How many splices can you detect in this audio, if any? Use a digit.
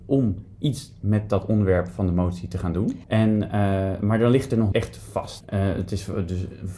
1